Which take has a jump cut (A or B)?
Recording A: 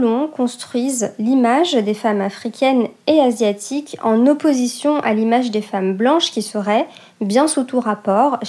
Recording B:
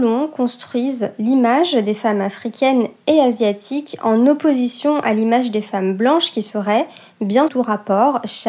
B